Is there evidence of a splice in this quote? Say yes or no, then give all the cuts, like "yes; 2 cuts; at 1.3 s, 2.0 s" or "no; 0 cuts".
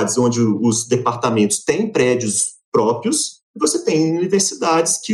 no; 0 cuts